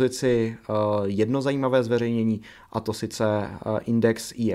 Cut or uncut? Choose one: uncut